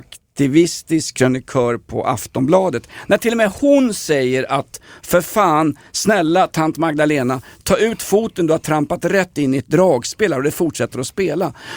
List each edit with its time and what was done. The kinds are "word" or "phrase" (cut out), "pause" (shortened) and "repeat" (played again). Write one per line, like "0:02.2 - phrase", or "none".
none